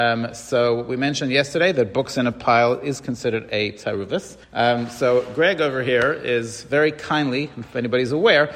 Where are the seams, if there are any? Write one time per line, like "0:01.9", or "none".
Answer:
0:04.4